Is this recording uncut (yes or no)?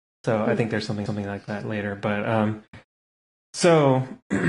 no